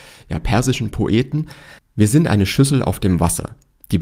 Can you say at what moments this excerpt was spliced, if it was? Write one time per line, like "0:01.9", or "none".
0:01.8